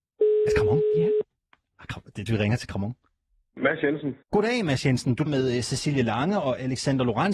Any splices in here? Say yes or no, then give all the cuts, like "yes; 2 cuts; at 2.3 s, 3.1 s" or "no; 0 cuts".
yes; 3 cuts; at 2.3 s, 4.2 s, 5.3 s